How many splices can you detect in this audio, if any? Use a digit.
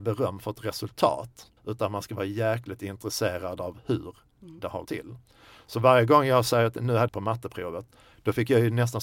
3